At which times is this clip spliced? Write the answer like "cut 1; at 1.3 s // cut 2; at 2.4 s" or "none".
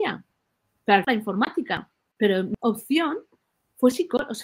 cut 1; at 1.1 s // cut 2; at 2.6 s